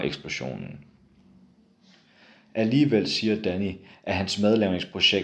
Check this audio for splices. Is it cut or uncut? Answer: uncut